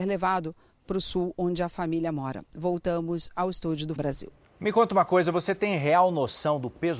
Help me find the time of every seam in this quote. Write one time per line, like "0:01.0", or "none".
0:04.0